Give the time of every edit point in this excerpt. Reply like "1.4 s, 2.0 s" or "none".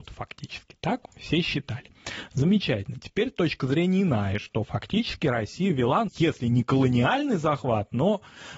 6.1 s